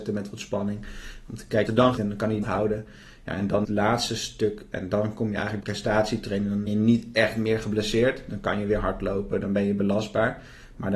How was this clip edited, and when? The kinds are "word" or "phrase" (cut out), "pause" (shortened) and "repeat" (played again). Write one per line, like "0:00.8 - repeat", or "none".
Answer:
0:01.7 - word
0:02.0 - word
0:02.4 - word
0:03.6 - word
0:05.6 - word
0:06.7 - word